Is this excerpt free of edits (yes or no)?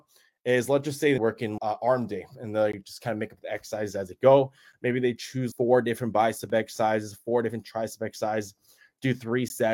no